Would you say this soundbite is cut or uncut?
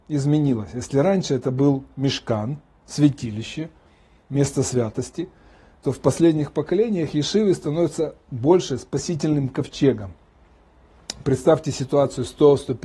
uncut